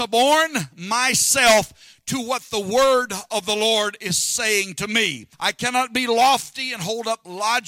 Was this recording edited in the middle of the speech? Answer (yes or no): yes